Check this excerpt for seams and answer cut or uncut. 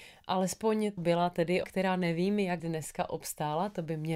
cut